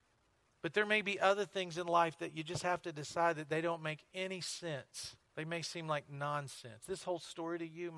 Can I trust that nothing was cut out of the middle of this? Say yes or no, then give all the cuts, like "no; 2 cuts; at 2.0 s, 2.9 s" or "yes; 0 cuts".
no; 1 cut; at 5.2 s